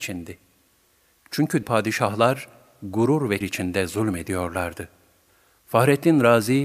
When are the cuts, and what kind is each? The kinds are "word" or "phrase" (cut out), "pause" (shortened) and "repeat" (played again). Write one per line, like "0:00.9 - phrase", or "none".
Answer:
0:01.6 - word
0:03.4 - word